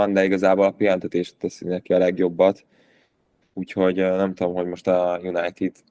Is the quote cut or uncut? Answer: uncut